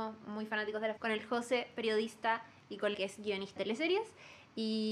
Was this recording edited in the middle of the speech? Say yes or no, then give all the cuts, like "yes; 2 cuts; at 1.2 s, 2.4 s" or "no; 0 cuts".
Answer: yes; 3 cuts; at 1.0 s, 2.9 s, 3.6 s